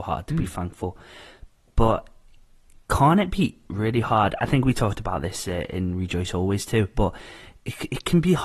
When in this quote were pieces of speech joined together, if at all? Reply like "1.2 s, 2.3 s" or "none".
none

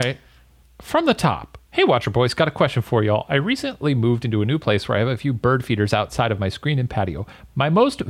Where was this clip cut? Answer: 1.7 s

